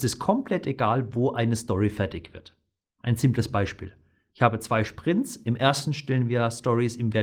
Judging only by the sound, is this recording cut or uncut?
uncut